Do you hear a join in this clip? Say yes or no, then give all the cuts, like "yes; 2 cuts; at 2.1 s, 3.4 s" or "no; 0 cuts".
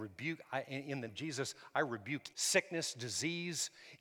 yes; 2 cuts; at 1.1 s, 2.3 s